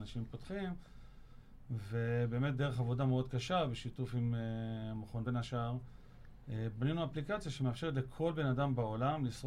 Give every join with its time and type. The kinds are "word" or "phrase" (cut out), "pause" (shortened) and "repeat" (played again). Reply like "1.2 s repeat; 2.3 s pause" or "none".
5.3 s word